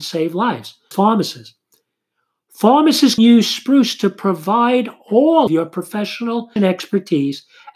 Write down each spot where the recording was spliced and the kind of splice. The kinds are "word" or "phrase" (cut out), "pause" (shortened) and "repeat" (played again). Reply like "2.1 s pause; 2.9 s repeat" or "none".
0.9 s word; 3.2 s word; 5.5 s word; 6.6 s word